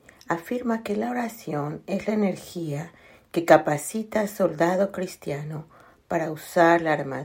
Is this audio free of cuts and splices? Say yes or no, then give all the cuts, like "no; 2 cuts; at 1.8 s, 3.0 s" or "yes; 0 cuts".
yes; 0 cuts